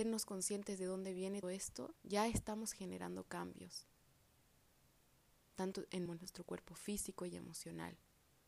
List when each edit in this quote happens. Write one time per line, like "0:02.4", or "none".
0:01.4
0:02.0
0:05.7
0:06.1